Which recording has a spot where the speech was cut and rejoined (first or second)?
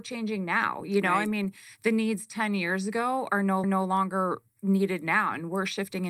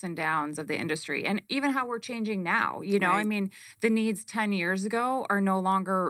first